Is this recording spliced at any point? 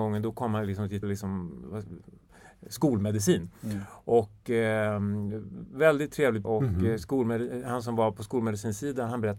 yes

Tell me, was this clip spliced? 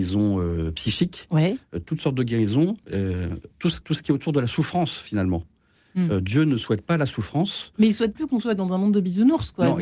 yes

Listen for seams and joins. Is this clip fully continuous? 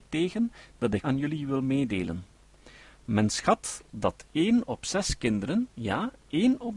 no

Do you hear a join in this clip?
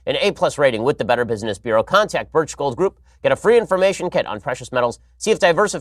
yes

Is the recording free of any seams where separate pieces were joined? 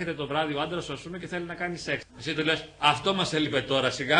no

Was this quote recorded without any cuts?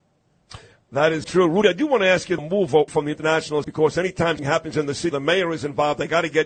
no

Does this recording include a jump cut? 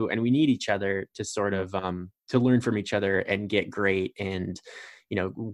yes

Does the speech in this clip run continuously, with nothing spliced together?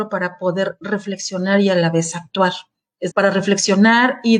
no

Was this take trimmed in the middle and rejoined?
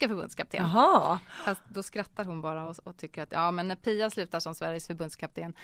no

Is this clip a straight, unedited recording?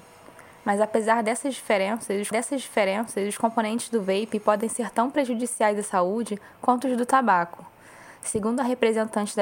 no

